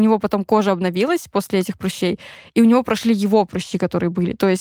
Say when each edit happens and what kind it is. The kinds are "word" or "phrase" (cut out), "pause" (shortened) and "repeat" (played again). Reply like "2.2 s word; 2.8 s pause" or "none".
none